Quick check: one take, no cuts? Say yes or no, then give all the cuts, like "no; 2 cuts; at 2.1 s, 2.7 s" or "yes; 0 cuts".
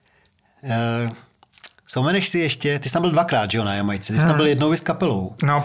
yes; 0 cuts